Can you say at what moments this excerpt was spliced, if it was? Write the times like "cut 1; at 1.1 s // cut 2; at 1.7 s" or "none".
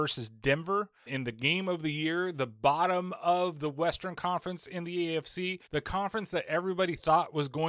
cut 1; at 1.1 s // cut 2; at 5.7 s